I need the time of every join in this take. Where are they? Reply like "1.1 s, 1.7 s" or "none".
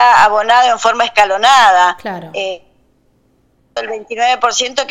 3.8 s